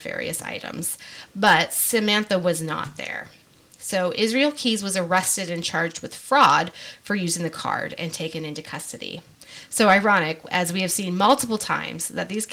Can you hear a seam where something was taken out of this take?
no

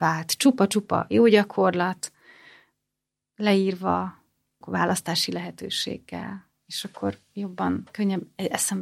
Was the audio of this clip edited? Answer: yes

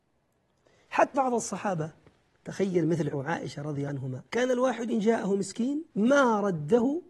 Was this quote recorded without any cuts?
no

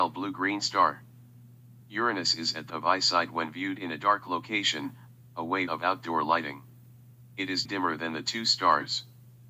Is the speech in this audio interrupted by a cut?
yes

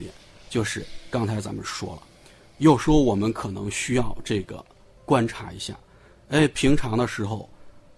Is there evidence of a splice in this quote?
no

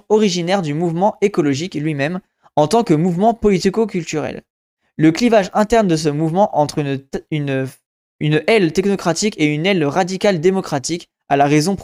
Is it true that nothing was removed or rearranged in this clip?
yes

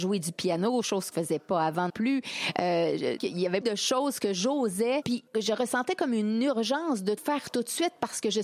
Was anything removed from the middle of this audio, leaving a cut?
yes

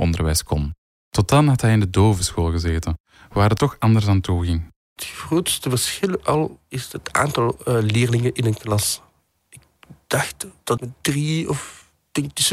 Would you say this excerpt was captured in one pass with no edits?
no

